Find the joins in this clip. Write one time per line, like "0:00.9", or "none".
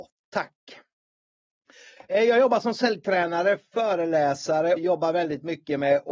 0:04.8